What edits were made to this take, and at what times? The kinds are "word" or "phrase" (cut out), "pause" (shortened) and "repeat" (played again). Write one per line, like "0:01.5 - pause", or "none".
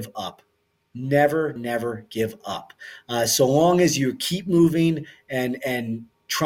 0:01.6 - word